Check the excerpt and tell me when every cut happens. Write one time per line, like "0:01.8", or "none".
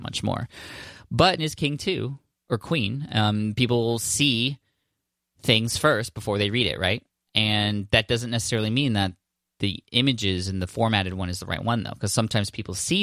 0:01.4